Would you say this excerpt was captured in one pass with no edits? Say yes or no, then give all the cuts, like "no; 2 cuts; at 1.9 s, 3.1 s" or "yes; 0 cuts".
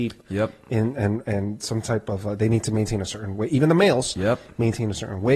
yes; 0 cuts